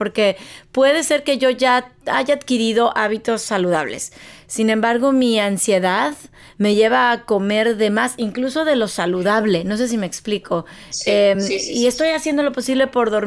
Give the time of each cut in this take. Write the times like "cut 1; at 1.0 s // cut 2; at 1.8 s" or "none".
none